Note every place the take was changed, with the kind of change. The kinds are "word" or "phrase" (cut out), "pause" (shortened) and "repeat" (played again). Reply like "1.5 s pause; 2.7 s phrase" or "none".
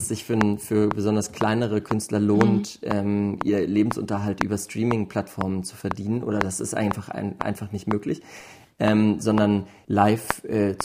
none

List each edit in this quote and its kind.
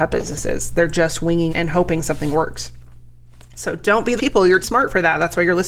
1.5 s word; 4.2 s word; 4.6 s word

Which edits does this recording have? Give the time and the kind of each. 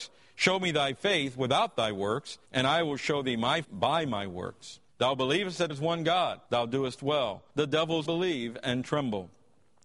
2.4 s pause; 3.6 s word; 4.9 s pause; 5.7 s word; 6.4 s pause; 7.5 s pause; 8.0 s word

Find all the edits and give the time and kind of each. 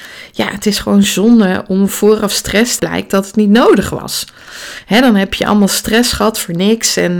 2.8 s phrase

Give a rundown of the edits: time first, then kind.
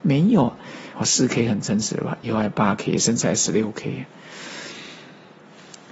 0.9 s phrase

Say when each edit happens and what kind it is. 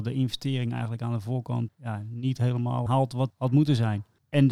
1.7 s word; 2.9 s word; 3.3 s word

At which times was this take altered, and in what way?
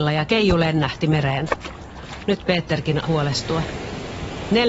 3.0 s word

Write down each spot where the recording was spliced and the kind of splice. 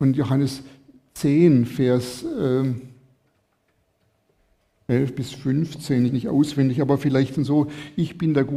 6.1 s phrase

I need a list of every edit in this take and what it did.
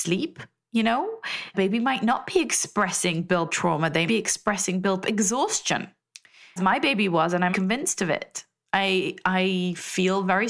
1.5 s word; 3.5 s word; 4.1 s word; 5.0 s word; 6.6 s word; 7.5 s word

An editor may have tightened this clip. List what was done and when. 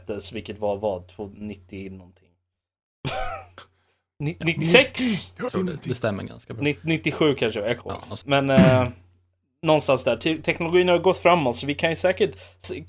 5.5 s word; 7.8 s phrase; 8.2 s word

